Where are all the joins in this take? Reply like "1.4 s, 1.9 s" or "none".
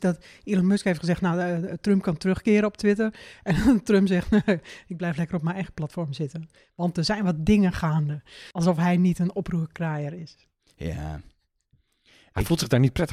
8.5 s